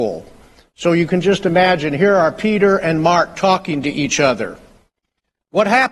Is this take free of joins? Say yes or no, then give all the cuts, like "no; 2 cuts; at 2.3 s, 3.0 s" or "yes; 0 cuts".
yes; 0 cuts